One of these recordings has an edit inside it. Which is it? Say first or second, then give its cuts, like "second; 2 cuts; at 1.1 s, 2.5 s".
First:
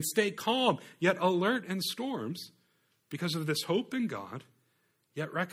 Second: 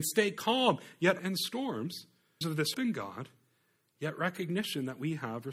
second; 3 cuts; at 1.2 s, 2.4 s, 2.7 s